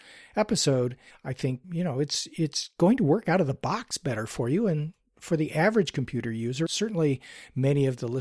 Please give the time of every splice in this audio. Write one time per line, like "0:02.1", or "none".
0:01.1
0:01.6
0:06.7